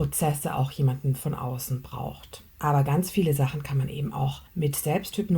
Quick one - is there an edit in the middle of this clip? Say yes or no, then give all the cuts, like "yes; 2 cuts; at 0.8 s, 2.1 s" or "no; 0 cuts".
yes; 2 cuts; at 2.5 s, 4.5 s